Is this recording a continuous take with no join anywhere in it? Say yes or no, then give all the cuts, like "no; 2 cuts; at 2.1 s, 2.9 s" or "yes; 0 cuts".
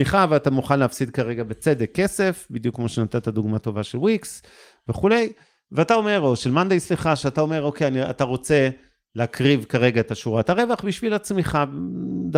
yes; 0 cuts